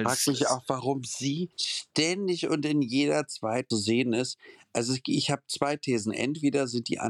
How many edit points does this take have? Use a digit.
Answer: 2